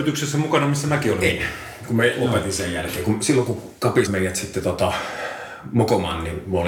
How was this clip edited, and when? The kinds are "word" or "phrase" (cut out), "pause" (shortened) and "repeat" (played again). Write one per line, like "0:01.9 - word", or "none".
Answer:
0:04.1 - word